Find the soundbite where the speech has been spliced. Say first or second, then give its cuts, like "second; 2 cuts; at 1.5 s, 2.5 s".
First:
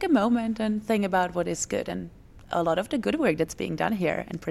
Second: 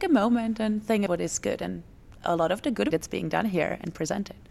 second; 2 cuts; at 1.1 s, 2.9 s